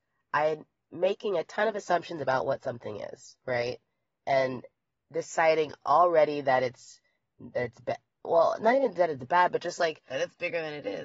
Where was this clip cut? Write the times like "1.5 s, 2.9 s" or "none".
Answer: none